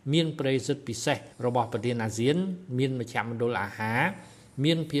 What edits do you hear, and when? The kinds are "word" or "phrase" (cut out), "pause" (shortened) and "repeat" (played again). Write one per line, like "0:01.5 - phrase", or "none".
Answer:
0:01.3 - pause